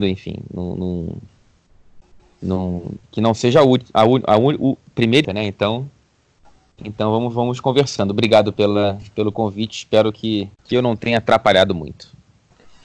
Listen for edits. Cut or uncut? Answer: cut